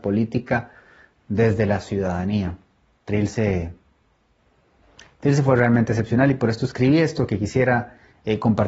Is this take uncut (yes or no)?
yes